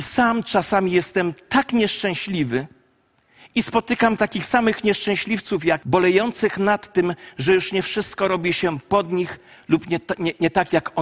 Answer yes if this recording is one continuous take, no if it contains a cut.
no